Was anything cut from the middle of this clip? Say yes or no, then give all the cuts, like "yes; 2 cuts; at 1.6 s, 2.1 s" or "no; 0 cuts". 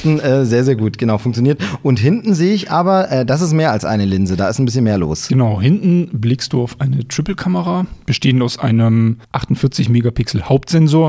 yes; 1 cut; at 9.2 s